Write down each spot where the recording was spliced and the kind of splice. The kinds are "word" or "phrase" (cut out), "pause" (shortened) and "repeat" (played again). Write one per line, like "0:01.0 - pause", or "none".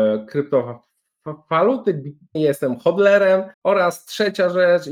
0:02.4 - word
0:03.5 - pause